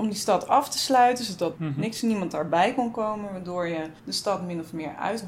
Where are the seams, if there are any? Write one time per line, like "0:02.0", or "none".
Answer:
0:04.0